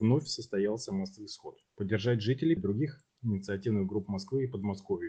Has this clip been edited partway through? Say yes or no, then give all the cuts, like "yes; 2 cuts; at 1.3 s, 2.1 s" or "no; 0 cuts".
yes; 2 cuts; at 1.7 s, 2.6 s